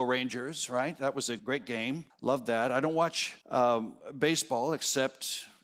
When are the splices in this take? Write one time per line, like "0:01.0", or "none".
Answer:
0:01.4
0:02.1
0:03.4